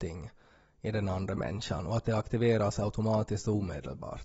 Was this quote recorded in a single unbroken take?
yes; 0 cuts

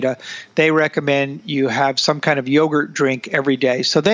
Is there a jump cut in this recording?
no; 0 cuts

